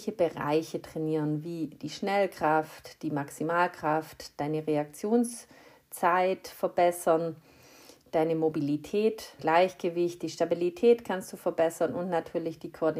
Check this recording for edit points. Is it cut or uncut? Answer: cut